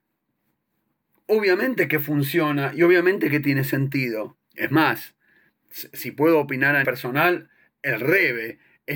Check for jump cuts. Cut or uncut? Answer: cut